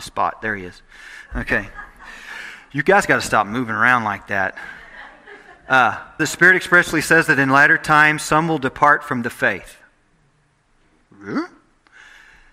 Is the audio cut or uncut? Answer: cut